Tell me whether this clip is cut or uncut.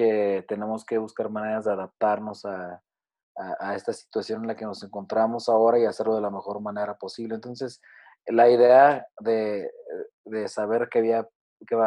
uncut